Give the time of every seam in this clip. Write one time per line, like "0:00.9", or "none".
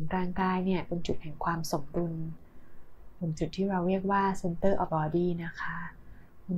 0:04.9